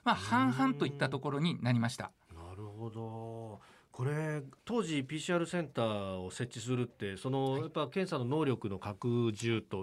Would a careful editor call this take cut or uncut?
uncut